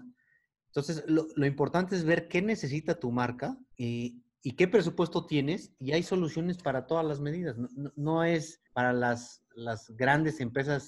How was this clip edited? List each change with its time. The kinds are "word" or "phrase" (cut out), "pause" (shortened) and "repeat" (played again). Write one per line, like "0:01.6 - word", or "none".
0:03.7 - pause
0:08.7 - pause